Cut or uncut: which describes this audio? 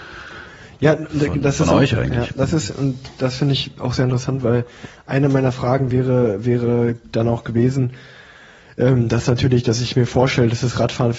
uncut